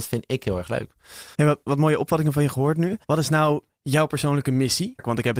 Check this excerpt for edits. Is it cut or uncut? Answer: cut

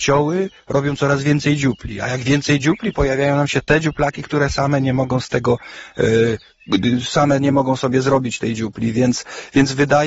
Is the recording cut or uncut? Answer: uncut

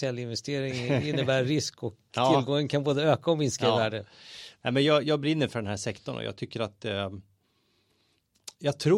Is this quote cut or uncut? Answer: uncut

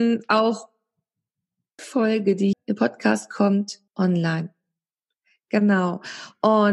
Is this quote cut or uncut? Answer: cut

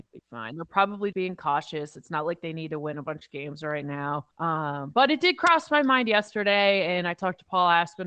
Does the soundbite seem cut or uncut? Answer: cut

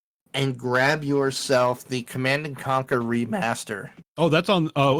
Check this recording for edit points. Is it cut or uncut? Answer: cut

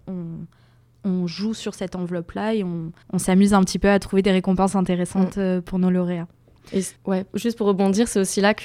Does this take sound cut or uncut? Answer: cut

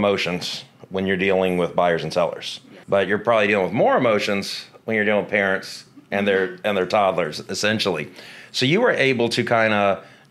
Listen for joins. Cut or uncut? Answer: cut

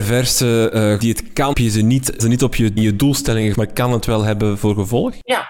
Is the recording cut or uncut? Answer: cut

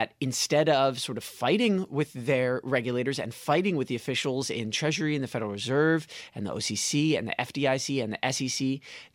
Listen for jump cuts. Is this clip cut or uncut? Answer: uncut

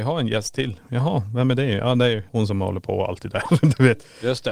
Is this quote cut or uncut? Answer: cut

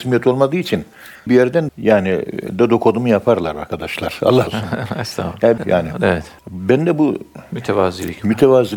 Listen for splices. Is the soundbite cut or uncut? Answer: cut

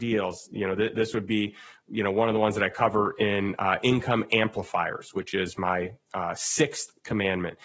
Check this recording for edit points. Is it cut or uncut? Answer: uncut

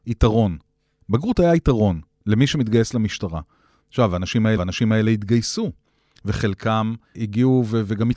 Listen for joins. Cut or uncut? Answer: cut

